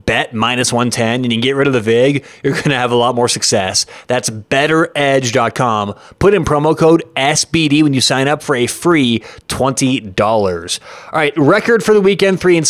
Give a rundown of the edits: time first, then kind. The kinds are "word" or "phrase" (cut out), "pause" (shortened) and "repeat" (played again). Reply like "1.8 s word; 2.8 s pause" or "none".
none